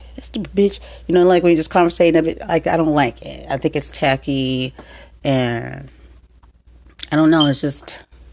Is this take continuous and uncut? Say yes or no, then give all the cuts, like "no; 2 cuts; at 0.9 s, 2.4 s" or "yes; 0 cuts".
yes; 0 cuts